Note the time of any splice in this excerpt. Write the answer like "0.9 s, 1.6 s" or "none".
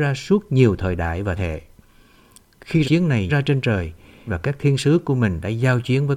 1.4 s, 2.8 s, 3.3 s, 4.3 s